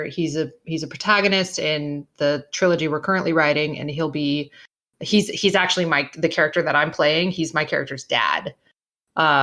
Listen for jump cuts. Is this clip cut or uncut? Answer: uncut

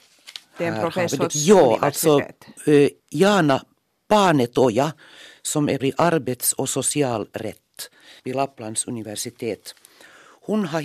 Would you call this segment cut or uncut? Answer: cut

